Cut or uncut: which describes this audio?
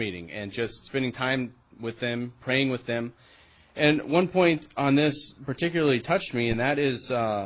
uncut